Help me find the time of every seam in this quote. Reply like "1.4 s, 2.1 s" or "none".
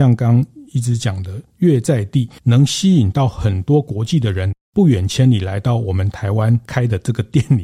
2.4 s